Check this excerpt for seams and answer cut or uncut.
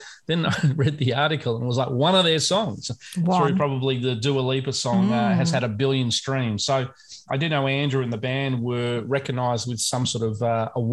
cut